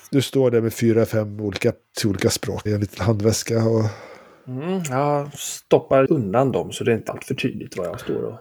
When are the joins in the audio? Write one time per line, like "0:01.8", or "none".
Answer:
0:01.9
0:02.7
0:06.1
0:07.1

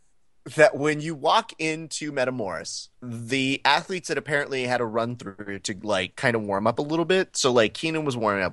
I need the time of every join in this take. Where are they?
0:02.9

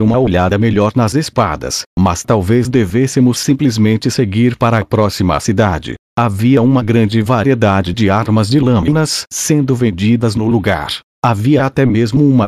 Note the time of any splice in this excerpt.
0:06.0
0:11.1

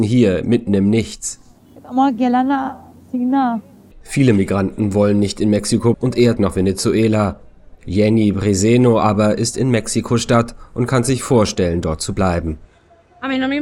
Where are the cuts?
0:04.0
0:05.9
0:06.4
0:07.8

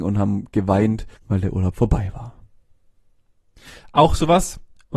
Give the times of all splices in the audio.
0:01.2

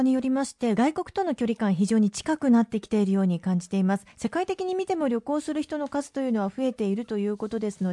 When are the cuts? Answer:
0:04.1

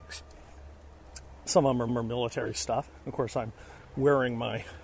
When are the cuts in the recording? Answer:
0:01.9
0:03.0
0:03.8

